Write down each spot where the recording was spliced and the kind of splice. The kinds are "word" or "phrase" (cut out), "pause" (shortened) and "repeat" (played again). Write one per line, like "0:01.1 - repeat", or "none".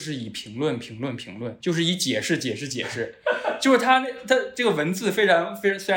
0:01.6 - word